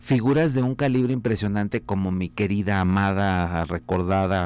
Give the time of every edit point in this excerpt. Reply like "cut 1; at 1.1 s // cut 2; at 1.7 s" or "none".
none